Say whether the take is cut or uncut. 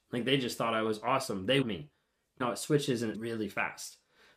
cut